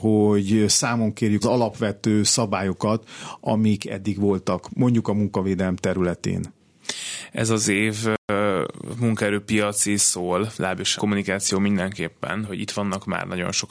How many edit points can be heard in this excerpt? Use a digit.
4